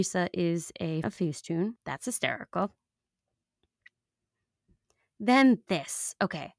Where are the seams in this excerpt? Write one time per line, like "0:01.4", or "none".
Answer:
0:01.0
0:01.8